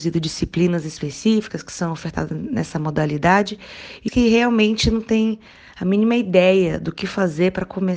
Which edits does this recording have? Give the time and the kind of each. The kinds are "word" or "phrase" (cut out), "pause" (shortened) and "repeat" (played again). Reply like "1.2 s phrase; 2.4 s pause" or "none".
4.1 s word